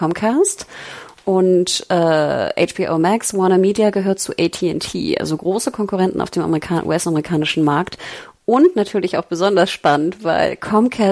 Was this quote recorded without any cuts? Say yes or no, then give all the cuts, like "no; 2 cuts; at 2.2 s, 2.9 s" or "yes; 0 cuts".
yes; 0 cuts